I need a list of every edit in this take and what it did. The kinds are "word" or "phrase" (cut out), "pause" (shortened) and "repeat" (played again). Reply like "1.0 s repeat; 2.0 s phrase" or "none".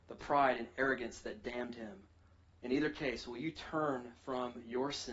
2.3 s pause